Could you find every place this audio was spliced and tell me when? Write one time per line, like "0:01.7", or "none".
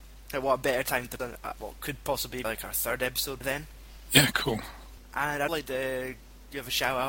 0:01.2
0:01.6
0:02.4
0:03.4
0:05.5